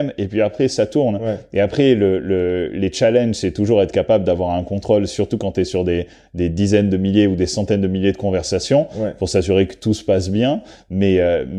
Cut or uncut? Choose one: uncut